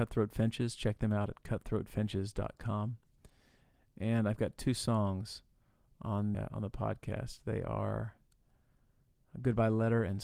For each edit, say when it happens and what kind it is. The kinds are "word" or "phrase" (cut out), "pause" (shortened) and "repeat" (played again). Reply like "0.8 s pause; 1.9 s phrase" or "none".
6.3 s word